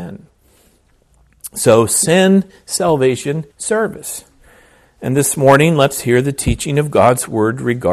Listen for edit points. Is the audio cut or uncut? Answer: cut